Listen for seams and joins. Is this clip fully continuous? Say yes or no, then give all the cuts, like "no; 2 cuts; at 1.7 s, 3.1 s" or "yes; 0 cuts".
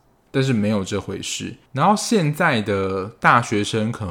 no; 1 cut; at 1.7 s